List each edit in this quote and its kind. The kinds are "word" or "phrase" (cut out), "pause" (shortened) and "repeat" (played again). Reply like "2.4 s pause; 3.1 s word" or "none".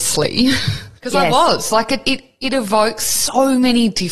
1.0 s pause